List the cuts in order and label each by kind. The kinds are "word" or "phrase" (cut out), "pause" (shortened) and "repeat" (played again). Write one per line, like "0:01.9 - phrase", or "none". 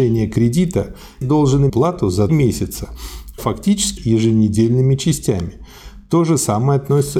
0:01.2 - word
0:01.7 - phrase
0:02.3 - word
0:03.4 - word
0:04.0 - phrase